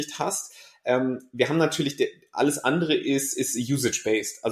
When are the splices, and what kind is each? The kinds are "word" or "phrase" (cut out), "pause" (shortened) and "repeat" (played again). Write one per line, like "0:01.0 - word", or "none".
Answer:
none